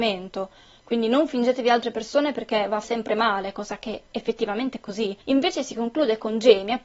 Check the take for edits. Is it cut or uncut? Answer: cut